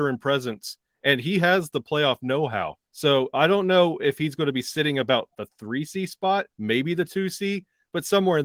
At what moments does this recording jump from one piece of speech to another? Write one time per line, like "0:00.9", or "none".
0:02.9
0:06.5